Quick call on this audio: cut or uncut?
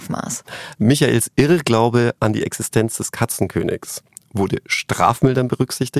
uncut